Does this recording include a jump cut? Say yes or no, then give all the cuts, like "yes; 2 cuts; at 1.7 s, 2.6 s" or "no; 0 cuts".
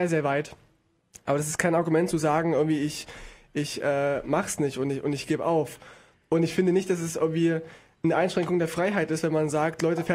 no; 0 cuts